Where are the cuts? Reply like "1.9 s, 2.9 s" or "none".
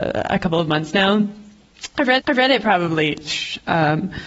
2.2 s